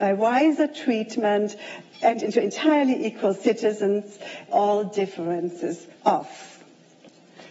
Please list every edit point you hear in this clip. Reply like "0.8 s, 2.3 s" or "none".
2.2 s, 4.5 s, 6.0 s